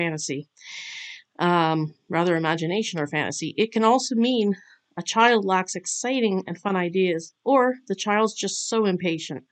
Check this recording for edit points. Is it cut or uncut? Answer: uncut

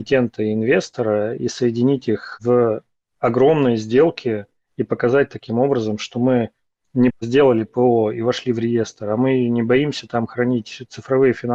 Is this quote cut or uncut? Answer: cut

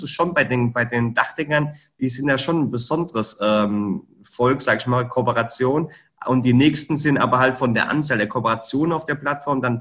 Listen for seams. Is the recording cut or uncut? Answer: uncut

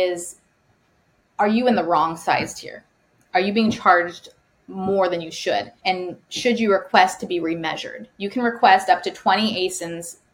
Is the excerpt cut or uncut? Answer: cut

